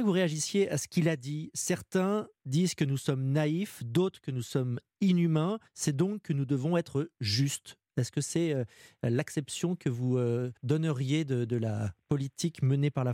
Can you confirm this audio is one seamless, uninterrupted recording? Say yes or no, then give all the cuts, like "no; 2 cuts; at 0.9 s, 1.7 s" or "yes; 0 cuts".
no; 2 cuts; at 5.7 s, 10.6 s